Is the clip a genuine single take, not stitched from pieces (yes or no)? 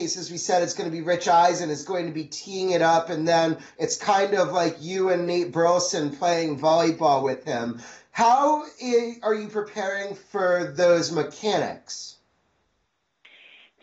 yes